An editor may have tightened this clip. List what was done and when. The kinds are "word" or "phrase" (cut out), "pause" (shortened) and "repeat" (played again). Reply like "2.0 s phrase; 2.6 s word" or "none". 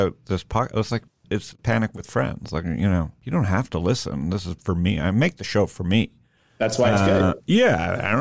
3.2 s pause